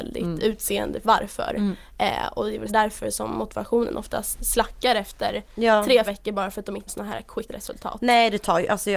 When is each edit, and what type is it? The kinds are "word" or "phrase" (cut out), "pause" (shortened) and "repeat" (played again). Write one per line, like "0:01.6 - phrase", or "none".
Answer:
0:01.0 - word
0:02.7 - word
0:04.4 - word
0:06.0 - word
0:06.9 - word
0:07.5 - word